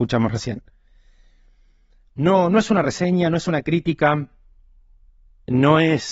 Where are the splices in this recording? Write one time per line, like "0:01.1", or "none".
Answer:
none